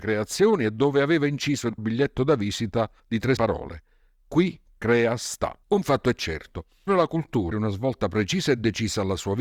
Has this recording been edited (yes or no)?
yes